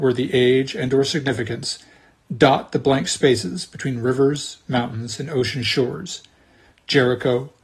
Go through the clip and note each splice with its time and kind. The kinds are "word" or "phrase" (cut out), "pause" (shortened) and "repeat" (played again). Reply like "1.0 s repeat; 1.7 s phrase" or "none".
none